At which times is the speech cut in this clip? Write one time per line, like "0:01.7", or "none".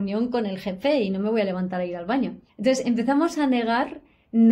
0:02.5